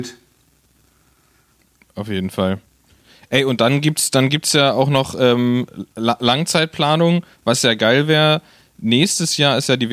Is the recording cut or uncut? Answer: uncut